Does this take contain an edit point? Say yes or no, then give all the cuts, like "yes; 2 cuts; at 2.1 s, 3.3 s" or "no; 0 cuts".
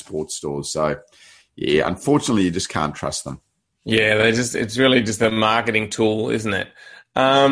no; 0 cuts